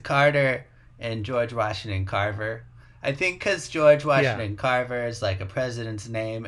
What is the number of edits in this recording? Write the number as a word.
zero